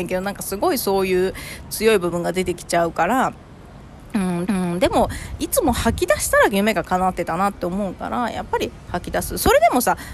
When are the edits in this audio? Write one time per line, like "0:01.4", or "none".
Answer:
0:04.5